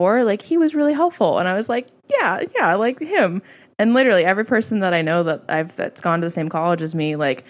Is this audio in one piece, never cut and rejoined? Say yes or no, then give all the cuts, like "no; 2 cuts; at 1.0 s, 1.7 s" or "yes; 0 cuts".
yes; 0 cuts